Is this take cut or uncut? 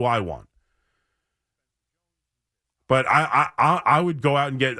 uncut